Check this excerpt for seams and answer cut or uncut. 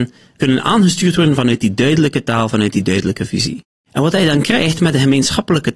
uncut